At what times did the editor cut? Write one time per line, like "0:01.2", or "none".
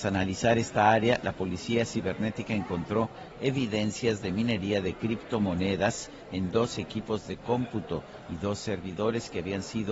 none